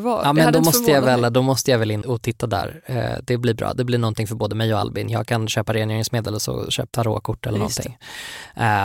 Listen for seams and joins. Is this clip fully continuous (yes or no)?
no